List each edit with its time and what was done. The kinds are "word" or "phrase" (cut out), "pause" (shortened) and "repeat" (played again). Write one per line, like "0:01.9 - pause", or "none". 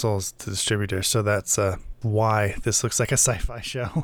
0:02.0 - word